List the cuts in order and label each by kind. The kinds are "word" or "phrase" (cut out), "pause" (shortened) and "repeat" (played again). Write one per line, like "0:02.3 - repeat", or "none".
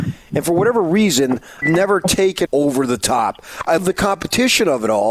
0:01.6 - word
0:02.5 - word
0:03.8 - word